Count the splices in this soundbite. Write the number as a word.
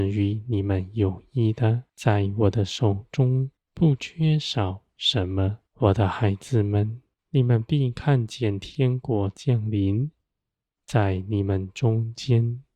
four